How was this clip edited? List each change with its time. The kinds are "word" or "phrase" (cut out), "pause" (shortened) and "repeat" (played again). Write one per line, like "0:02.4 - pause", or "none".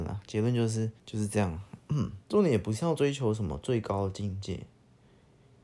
0:01.0 - pause
0:02.2 - pause

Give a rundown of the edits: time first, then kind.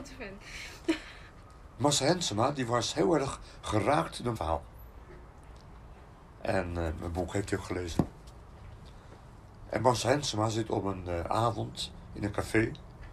0:04.4 - word

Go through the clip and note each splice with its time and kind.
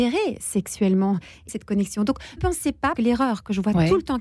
0:01.5 - phrase
0:02.4 - word
0:02.9 - word

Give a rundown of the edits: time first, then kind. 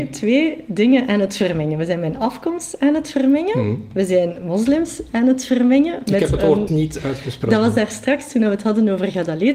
0:06.7 - word

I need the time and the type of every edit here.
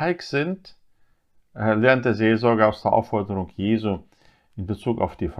none

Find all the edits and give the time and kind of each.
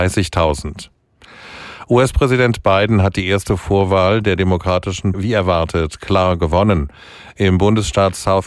0:05.1 - word

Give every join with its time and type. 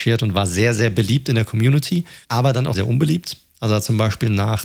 0:02.2 - pause
0:02.7 - word

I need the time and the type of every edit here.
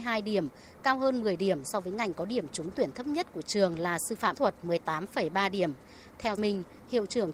0:04.3 - word
0:06.4 - phrase

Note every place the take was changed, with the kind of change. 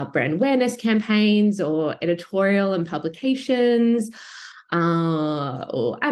none

